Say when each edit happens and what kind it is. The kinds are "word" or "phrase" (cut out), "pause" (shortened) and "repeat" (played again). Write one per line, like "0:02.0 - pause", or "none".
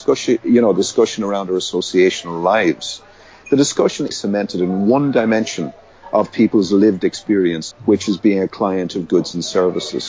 0:04.1 - phrase
0:07.7 - phrase